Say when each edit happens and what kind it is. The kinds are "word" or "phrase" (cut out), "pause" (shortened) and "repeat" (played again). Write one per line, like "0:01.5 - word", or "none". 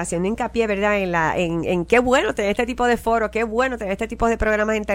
none